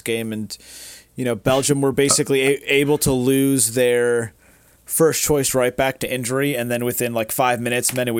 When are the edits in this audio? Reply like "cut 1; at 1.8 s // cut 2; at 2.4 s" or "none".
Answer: none